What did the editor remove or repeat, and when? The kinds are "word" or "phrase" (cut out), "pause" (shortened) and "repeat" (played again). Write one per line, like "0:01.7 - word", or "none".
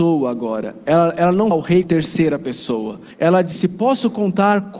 0:01.5 - word
0:01.8 - word
0:03.1 - pause
0:03.5 - word